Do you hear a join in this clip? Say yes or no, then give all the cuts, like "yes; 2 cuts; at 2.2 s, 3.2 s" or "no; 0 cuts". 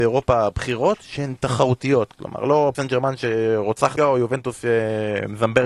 yes; 2 cuts; at 2.7 s, 4.0 s